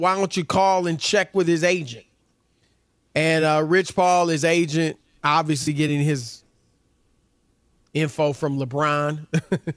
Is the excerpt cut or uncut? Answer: uncut